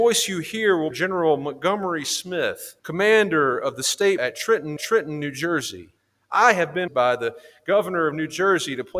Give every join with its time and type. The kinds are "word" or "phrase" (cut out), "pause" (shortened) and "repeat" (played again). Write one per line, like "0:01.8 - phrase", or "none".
0:00.9 - phrase
0:02.8 - pause
0:04.2 - word
0:04.8 - repeat
0:06.0 - pause
0:06.9 - word